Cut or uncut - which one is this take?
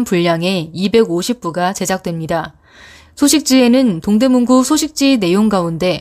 uncut